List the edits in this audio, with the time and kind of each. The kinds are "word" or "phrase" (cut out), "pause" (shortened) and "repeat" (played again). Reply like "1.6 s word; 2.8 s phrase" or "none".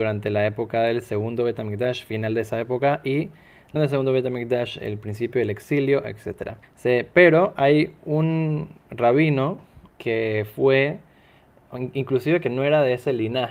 3.8 s word; 6.6 s pause; 9.9 s pause